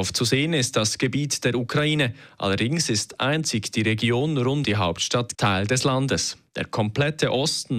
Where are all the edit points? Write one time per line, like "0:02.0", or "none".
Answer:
0:04.6
0:05.3